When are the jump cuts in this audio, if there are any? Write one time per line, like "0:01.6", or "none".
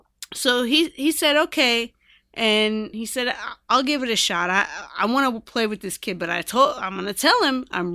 0:02.9